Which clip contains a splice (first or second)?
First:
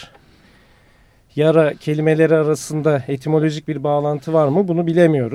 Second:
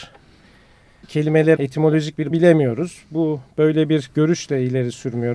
second